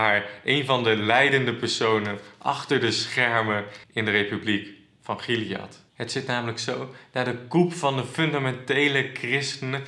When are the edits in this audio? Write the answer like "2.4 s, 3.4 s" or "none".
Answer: 3.8 s, 5.9 s